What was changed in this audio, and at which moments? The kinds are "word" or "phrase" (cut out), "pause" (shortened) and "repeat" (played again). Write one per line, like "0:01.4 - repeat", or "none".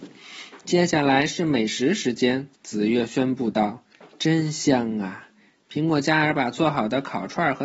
0:02.5 - pause